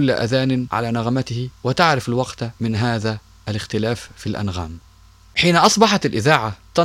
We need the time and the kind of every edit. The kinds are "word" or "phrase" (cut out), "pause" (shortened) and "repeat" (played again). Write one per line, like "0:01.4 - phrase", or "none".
none